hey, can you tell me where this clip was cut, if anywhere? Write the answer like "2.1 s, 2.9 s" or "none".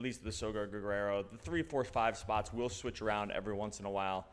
none